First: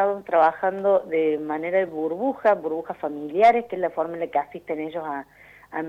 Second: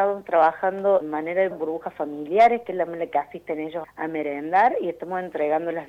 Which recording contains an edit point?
second; 4 cuts; at 1.0 s, 1.5 s, 2.9 s, 3.8 s

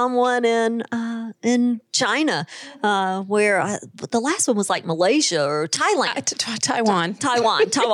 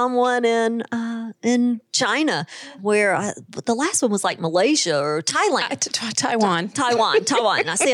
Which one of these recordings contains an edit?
second; 1 cut; at 2.8 s

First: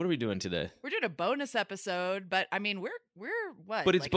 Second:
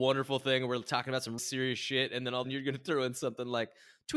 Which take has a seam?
second; 2 cuts; at 1.4 s, 2.4 s

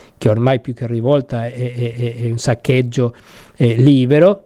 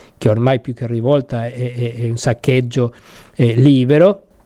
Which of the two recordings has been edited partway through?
first; 1 cut; at 1.9 s

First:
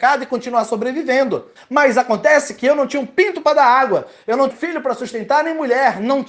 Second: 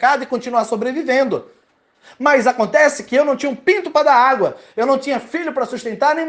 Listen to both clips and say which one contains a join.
first; 2 cuts; at 1.6 s, 4.5 s

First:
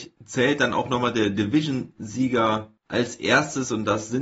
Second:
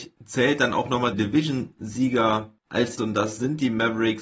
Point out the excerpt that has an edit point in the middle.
second; 2 cuts; at 1.1 s, 3.0 s

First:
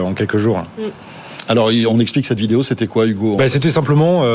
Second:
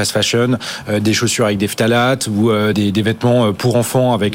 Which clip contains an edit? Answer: second; 1 cut; at 2.7 s

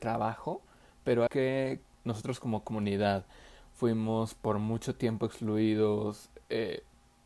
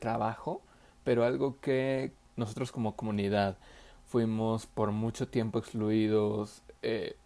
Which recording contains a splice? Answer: first; 1 cut; at 1.3 s

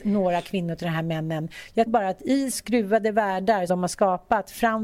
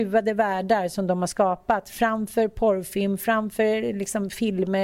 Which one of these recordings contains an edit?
first; 3 cuts; at 1.9 s, 2.5 s, 3.7 s

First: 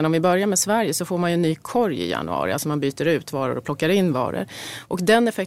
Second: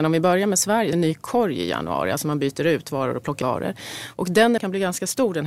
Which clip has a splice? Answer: second; 3 cuts; at 0.9 s, 3.4 s, 4.6 s

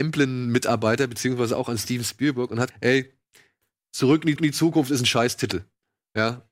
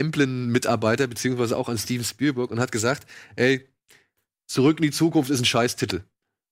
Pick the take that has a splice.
first; 2 cuts; at 2.7 s, 4.4 s

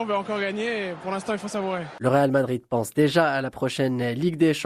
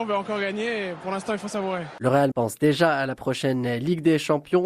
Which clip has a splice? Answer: second; 1 cut; at 2.3 s

